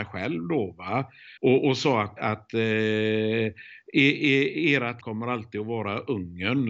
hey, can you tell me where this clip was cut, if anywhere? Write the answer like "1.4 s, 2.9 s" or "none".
1.4 s, 2.2 s, 5.0 s

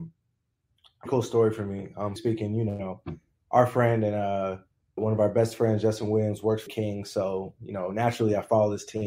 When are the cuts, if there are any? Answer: 1.1 s, 2.2 s, 5.0 s, 6.7 s

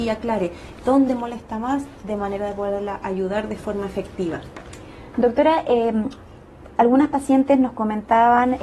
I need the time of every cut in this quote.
none

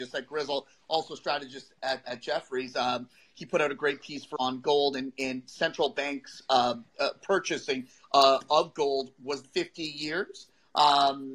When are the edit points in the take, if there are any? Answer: 2.0 s, 4.4 s, 9.4 s

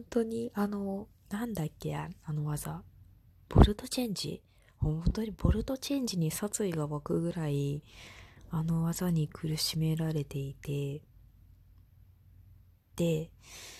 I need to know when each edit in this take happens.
none

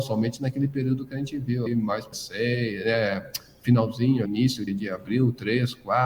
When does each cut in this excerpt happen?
1.7 s, 2.1 s, 4.3 s, 4.7 s

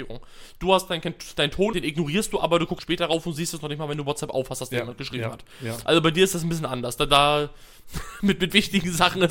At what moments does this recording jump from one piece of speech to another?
1.7 s, 2.8 s

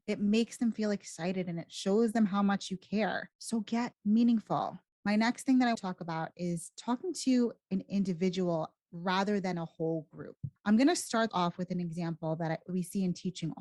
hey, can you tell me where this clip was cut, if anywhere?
5.7 s, 11.3 s

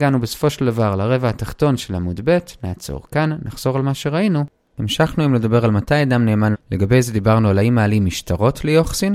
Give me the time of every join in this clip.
6.5 s

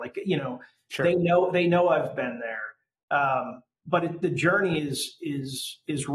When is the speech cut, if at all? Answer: none

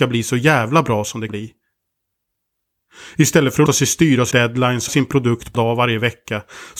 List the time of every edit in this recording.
1.3 s, 3.7 s, 4.3 s, 4.9 s, 5.5 s

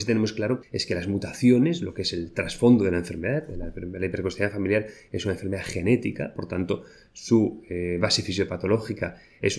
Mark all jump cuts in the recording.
none

